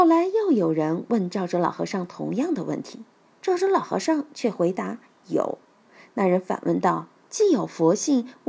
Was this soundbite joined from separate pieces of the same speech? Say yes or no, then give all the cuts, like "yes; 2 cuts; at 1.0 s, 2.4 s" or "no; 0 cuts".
no; 0 cuts